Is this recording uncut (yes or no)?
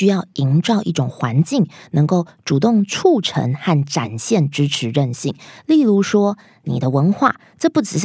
yes